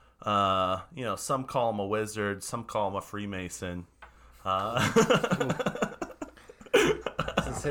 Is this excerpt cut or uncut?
uncut